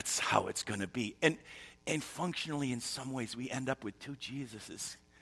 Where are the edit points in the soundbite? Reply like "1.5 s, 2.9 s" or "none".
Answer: 1.8 s